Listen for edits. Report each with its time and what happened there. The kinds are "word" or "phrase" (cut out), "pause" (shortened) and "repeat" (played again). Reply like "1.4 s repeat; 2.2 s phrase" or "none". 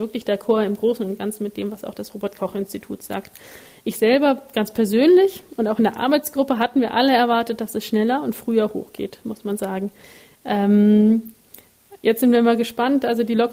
none